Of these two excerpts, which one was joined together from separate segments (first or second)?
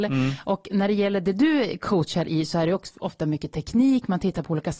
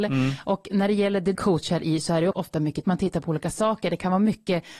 second